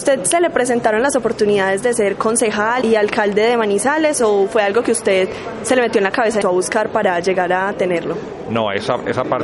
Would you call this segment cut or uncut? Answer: cut